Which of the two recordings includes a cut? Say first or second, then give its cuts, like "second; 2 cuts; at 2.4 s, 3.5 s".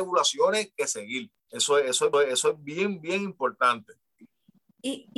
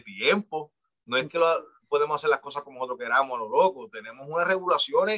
first; 2 cuts; at 1.4 s, 2.1 s